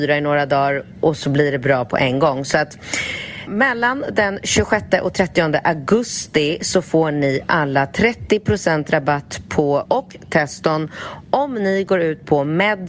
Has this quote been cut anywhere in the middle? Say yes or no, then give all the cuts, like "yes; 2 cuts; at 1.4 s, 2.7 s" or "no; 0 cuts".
yes; 2 cuts; at 3.5 s, 9.9 s